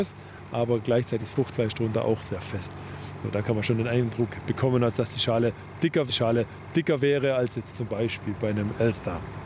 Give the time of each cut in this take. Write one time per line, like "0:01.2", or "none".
0:01.2
0:06.1